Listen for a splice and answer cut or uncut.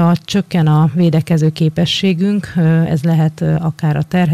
uncut